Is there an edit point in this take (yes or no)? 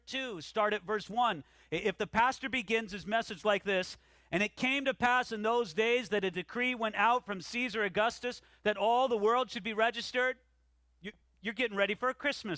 no